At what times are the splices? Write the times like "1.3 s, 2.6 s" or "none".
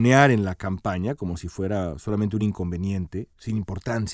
none